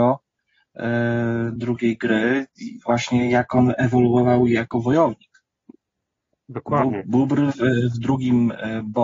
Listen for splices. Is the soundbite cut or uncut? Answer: uncut